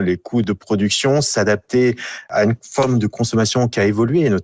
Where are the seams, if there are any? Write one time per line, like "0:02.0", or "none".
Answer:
none